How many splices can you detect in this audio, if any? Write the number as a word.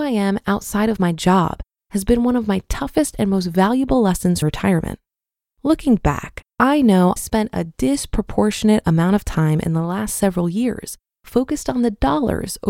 two